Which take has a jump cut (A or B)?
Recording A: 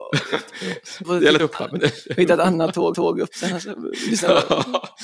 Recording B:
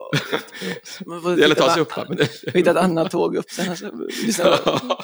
A